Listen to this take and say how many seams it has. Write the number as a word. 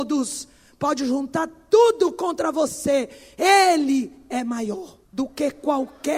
one